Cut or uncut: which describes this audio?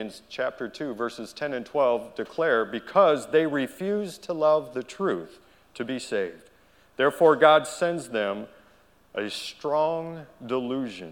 uncut